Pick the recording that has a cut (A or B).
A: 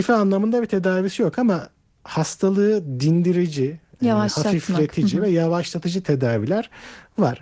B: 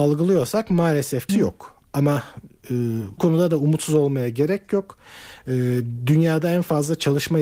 B